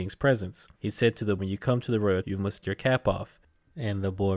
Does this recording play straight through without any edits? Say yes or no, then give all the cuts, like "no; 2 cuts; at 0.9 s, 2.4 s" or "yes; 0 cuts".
no; 3 cuts; at 1.4 s, 2.2 s, 2.6 s